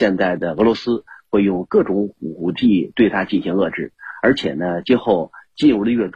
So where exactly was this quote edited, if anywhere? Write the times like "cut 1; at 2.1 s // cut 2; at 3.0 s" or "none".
none